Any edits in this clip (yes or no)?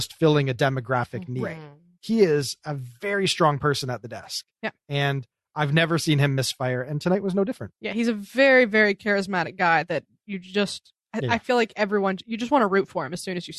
no